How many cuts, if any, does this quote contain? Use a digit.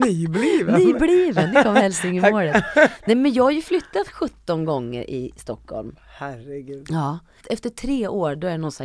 1